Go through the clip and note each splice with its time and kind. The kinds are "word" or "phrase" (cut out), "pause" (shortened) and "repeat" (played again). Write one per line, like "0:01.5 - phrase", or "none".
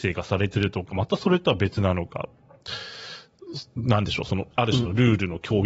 0:04.5 - pause